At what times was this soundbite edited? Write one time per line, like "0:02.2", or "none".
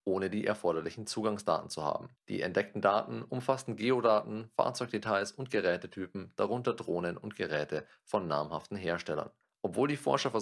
0:02.2
0:09.4